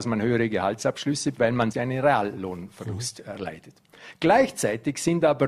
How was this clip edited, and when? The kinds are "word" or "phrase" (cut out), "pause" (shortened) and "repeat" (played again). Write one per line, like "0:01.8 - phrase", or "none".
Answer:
0:01.3 - word
0:01.7 - word